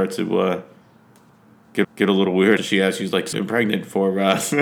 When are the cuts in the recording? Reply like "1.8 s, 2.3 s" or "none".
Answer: 1.8 s, 2.6 s, 3.3 s